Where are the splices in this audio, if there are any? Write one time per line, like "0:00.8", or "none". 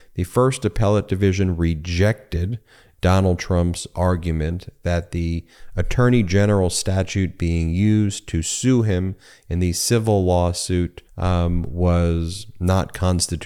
0:11.1